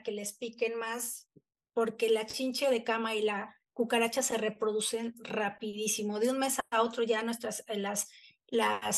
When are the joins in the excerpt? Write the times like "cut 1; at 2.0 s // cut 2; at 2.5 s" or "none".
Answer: none